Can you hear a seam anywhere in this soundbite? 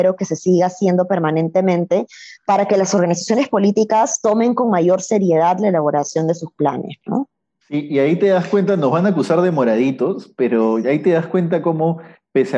no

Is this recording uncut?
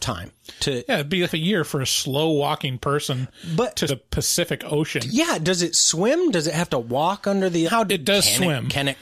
no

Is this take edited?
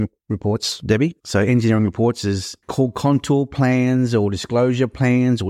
yes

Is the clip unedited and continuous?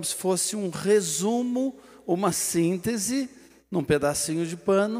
yes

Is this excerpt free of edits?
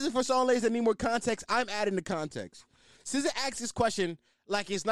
yes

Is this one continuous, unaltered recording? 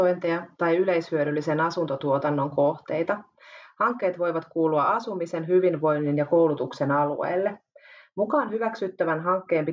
yes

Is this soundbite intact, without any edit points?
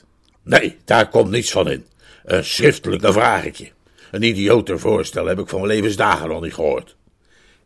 no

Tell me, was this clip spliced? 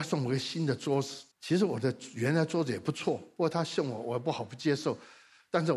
yes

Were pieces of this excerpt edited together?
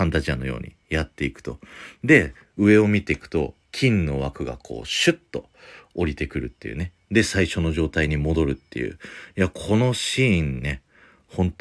no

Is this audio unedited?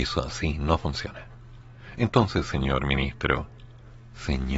yes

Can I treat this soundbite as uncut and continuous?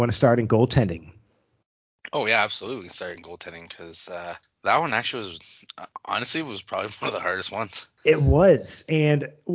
yes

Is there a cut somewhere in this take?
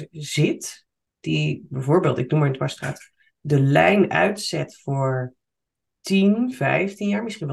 no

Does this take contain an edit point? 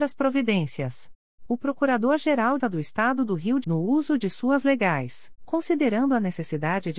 yes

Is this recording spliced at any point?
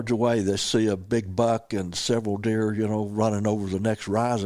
no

